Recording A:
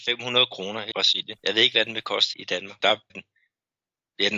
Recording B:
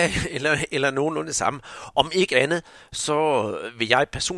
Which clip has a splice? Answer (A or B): A